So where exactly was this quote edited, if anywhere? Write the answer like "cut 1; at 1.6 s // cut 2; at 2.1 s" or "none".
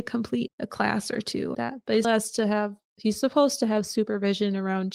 cut 1; at 1.5 s // cut 2; at 2.0 s

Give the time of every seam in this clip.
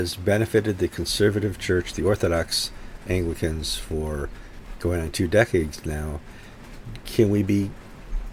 none

